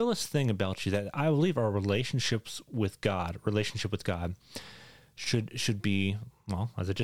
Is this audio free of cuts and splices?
yes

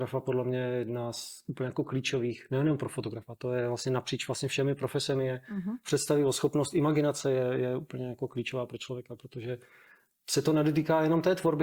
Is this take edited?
no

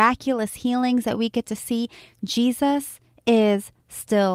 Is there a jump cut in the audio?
no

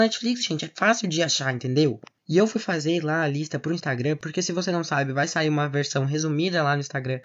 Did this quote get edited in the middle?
no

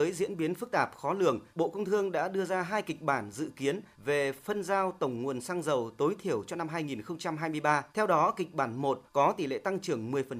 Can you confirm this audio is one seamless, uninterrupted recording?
no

